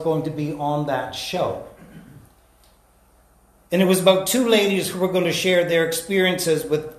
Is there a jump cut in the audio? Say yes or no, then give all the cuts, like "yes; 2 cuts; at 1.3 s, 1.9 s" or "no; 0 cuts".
no; 0 cuts